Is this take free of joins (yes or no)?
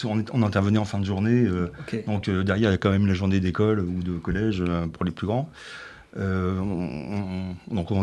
yes